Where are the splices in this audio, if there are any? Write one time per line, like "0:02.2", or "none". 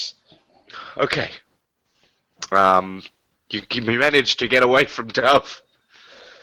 none